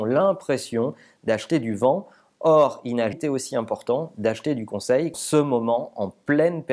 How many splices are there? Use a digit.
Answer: 2